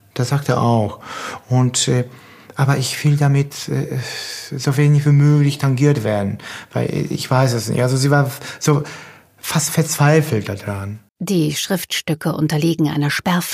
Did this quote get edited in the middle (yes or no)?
yes